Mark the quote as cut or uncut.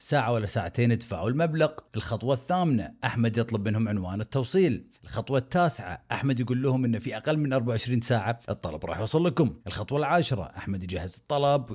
cut